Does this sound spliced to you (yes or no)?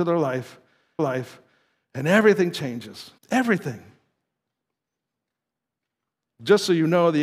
yes